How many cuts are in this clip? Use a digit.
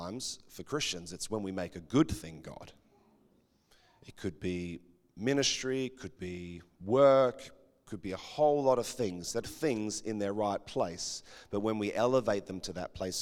2